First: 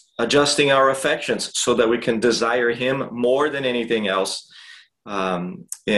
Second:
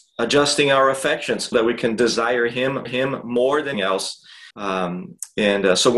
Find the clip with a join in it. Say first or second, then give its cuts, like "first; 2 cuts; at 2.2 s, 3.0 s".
second; 4 cuts; at 1.5 s, 2.9 s, 3.7 s, 4.5 s